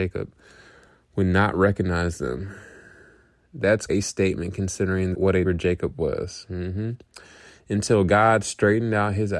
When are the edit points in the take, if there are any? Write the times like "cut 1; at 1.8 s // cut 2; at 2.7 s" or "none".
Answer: cut 1; at 3.9 s // cut 2; at 5.1 s // cut 3; at 5.4 s